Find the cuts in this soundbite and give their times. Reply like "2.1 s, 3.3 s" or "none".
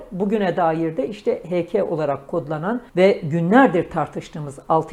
2.9 s

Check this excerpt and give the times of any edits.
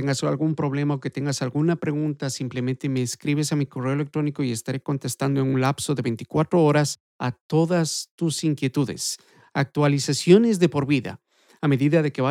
none

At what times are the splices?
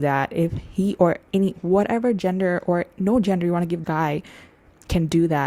1.3 s, 3.8 s

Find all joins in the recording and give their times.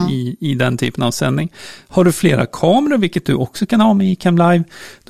none

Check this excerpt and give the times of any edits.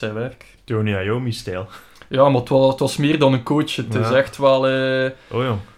none

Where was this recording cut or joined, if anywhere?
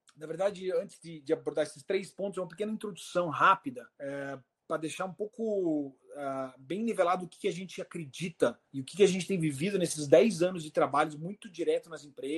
3.9 s, 8.7 s

